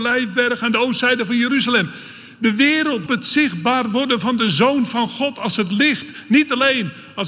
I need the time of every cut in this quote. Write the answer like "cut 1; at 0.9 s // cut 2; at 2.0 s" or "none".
cut 1; at 3.1 s